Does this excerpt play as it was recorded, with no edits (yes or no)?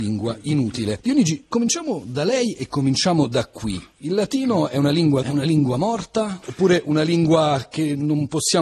no